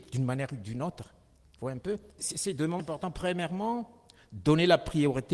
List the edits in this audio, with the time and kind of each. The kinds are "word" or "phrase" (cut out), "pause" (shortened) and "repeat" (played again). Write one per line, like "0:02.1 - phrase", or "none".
0:02.2 - word
0:02.8 - word